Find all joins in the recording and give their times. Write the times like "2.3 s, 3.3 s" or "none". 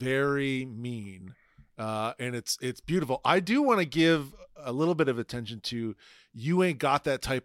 none